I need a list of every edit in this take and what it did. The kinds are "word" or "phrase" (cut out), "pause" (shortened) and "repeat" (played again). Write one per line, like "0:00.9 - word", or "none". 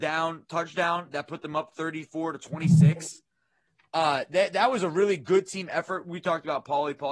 none